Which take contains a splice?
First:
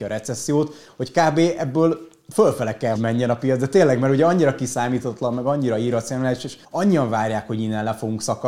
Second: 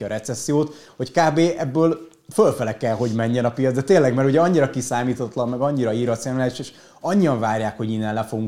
first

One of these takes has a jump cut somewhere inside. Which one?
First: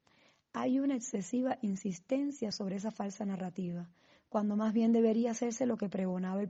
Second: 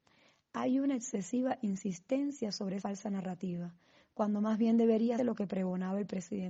second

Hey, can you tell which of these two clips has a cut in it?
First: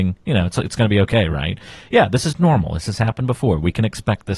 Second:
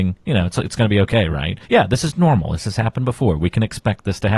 second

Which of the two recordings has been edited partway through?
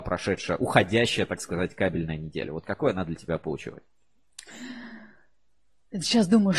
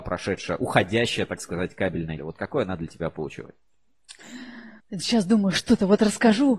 second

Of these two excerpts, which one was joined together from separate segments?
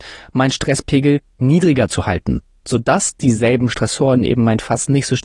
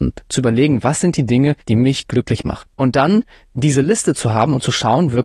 second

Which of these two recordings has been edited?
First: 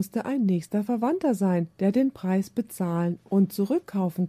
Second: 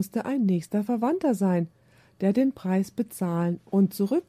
first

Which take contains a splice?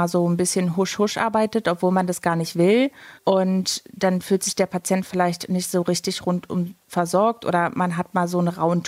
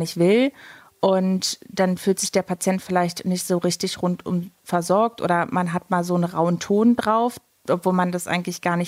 first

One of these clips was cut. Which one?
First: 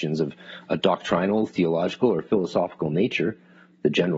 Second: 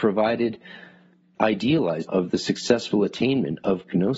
second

